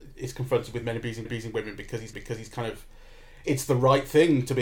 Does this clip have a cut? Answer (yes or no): yes